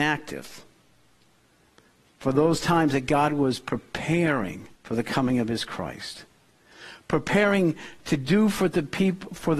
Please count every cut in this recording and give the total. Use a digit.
1